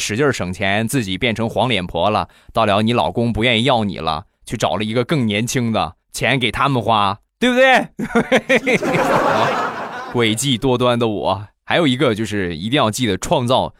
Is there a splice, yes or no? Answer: yes